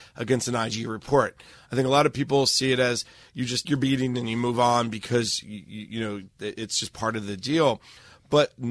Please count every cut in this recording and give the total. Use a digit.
1